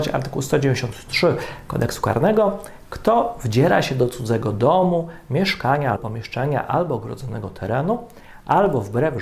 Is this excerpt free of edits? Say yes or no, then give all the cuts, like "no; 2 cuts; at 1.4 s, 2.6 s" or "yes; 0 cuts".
no; 1 cut; at 6.0 s